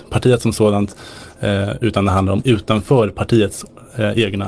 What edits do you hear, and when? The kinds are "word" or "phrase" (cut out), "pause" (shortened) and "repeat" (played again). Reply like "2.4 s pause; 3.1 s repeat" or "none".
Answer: 2.4 s word